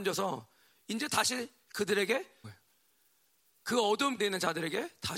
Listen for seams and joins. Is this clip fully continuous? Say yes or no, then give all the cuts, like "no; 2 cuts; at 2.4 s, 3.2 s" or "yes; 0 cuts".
no; 2 cuts; at 2.4 s, 4.2 s